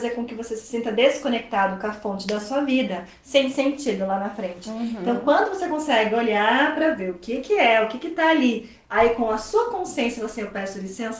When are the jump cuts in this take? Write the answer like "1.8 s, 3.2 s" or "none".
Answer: none